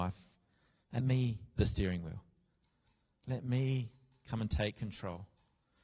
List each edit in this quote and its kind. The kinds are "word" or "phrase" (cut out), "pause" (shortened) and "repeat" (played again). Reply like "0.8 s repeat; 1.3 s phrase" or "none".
1.0 s word; 1.6 s word